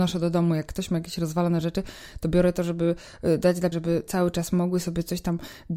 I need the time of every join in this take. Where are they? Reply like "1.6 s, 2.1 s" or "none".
3.7 s